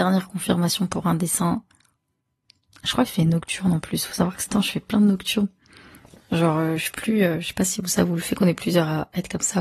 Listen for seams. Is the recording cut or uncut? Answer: cut